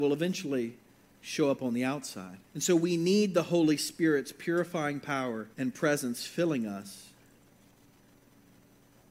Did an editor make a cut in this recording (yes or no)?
yes